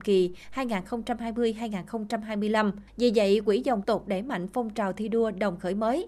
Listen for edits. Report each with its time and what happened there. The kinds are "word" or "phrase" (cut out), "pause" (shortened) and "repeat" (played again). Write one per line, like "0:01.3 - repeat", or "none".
0:02.9 - pause
0:03.5 - word
0:03.8 - phrase